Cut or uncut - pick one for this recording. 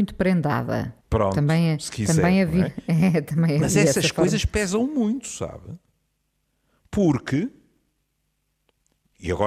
cut